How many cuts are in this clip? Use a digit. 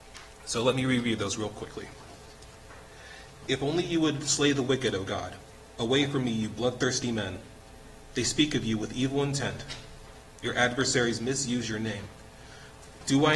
0